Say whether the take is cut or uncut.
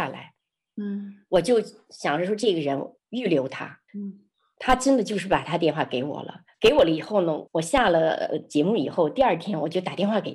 cut